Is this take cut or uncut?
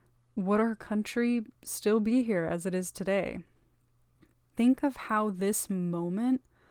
uncut